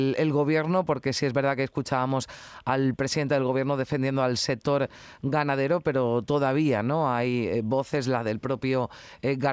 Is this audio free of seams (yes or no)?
yes